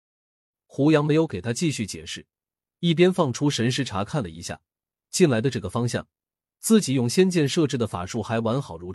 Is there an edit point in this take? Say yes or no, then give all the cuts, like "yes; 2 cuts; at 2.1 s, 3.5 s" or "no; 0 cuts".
no; 0 cuts